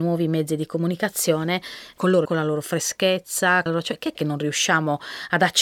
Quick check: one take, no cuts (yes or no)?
no